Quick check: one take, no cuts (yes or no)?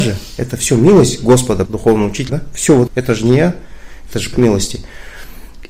no